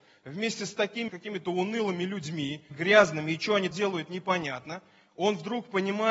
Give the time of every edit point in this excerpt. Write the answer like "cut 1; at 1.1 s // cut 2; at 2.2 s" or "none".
cut 1; at 1.1 s // cut 2; at 2.7 s // cut 3; at 3.7 s

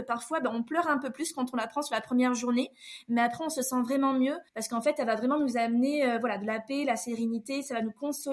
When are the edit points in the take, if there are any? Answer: cut 1; at 4.5 s

